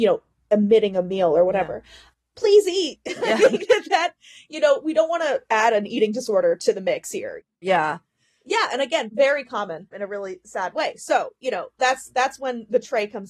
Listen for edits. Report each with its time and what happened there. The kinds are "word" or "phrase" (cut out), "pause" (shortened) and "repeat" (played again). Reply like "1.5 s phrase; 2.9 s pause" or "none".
none